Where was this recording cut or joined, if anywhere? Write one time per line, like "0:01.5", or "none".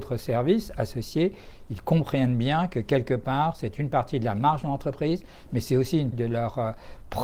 0:06.1

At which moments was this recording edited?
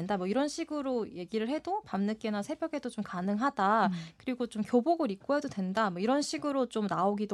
none

